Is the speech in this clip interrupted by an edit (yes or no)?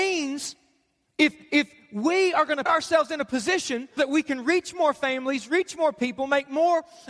yes